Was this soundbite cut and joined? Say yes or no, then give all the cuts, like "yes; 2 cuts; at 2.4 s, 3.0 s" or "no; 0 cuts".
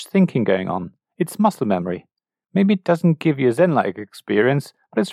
no; 0 cuts